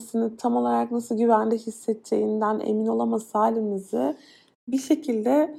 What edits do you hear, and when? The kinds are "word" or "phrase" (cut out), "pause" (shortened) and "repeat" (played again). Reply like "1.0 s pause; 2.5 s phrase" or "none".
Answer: none